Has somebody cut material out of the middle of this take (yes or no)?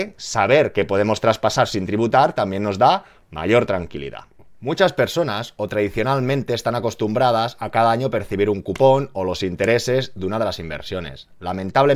no